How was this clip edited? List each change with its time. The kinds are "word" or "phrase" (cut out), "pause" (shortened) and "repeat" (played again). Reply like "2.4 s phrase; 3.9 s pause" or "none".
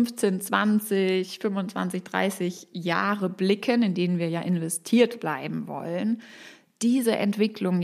none

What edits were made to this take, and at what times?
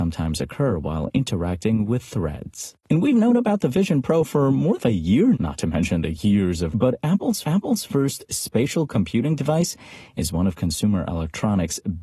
2.8 s pause; 4.8 s phrase; 5.3 s word; 6.7 s word; 7.4 s repeat

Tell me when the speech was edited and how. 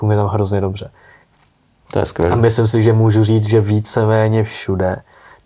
none

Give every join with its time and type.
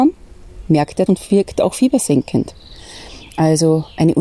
1.1 s word

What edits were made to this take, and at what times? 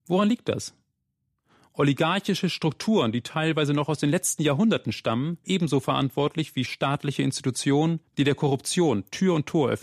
5.4 s phrase; 6.7 s word

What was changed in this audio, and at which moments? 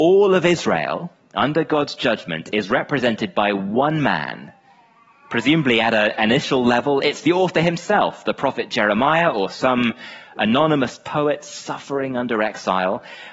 none

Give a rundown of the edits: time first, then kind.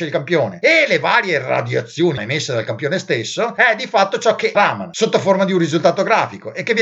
2.2 s word; 4.5 s phrase

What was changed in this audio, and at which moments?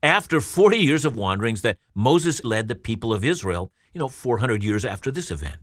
1.1 s word; 2.4 s word

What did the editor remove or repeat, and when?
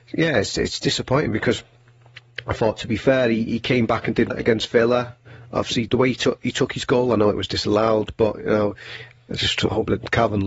4.3 s word; 5.9 s word

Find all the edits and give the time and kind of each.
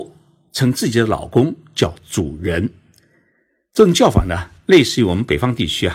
none

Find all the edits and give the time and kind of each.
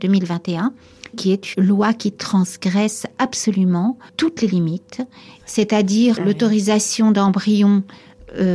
1.1 s word; 1.5 s word; 4.1 s word; 6.2 s word

